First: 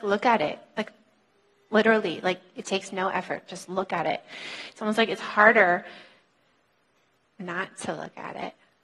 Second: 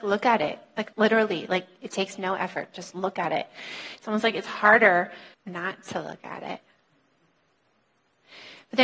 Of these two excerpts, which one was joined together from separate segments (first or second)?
second